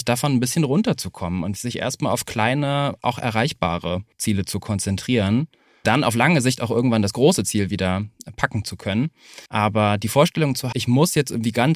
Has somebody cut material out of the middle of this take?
yes; 5 cuts; at 1.6 s, 4.1 s, 5.8 s, 9.5 s, 10.7 s

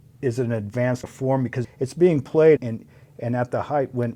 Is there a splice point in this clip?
yes; 3 cuts; at 1.0 s, 1.6 s, 2.6 s

